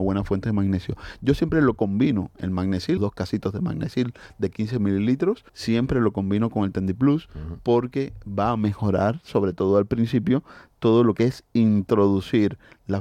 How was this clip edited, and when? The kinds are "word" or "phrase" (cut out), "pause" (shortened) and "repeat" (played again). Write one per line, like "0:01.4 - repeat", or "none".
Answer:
0:03.0 - word
0:05.5 - pause